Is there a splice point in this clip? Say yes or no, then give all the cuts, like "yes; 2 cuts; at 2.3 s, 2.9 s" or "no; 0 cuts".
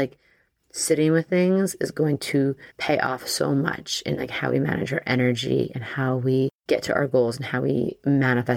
yes; 2 cuts; at 2.7 s, 6.6 s